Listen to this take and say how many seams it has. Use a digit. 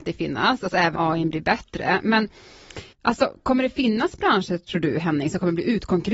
2